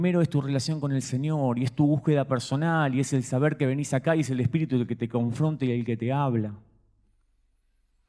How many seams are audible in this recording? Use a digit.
0